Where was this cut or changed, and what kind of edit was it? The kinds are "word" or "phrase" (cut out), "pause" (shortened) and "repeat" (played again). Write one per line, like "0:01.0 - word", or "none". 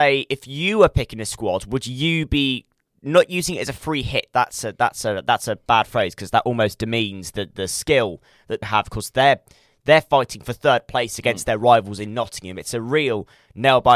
0:08.6 - phrase